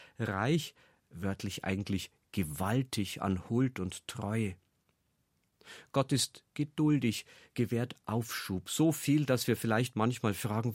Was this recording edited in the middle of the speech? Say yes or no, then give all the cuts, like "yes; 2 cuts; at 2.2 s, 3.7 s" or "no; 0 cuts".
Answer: no; 0 cuts